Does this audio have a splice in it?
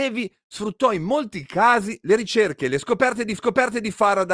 yes; 1 cut; at 3.4 s

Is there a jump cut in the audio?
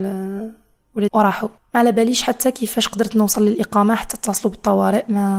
yes; 2 cuts; at 1.1 s, 1.6 s

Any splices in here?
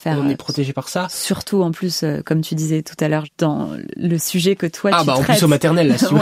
no; 0 cuts

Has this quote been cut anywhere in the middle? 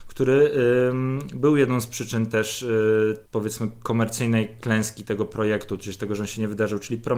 yes; 1 cut; at 3.3 s

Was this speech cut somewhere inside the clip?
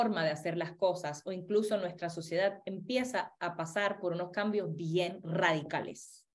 no; 0 cuts

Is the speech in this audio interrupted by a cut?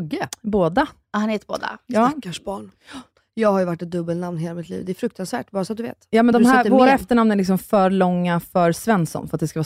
no; 0 cuts

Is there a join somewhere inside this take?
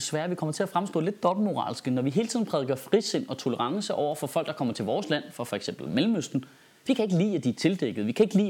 no; 0 cuts

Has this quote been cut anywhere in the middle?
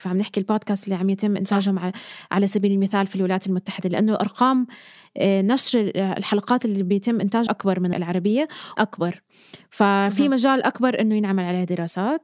yes; 3 cuts; at 7.5 s, 7.9 s, 8.8 s

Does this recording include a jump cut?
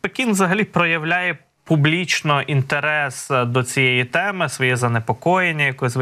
no; 0 cuts

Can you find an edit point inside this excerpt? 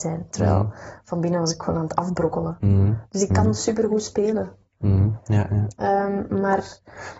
no; 0 cuts

